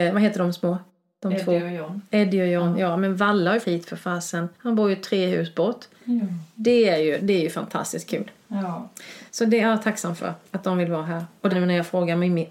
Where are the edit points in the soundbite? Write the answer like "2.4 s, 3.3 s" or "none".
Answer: 3.6 s, 4.5 s, 7.2 s, 9.3 s, 10.5 s, 11.5 s